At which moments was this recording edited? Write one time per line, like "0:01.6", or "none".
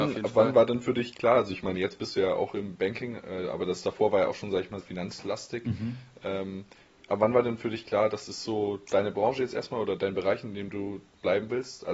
0:04.8
0:10.0